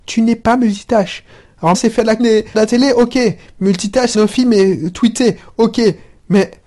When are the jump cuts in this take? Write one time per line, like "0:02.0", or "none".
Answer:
0:01.7
0:02.2
0:02.5
0:04.1